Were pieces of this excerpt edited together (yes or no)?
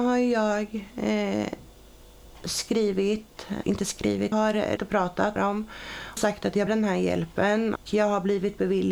yes